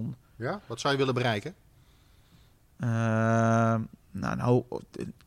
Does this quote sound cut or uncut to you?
uncut